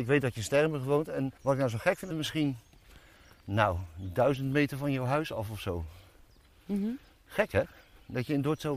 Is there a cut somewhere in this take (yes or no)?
yes